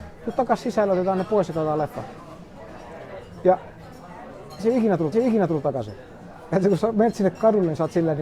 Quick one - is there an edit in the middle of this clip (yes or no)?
yes